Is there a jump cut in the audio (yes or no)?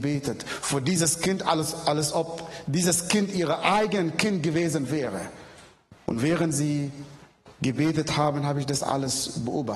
yes